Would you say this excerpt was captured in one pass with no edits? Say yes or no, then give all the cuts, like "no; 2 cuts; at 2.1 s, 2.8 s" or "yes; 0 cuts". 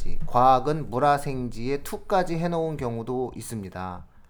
yes; 0 cuts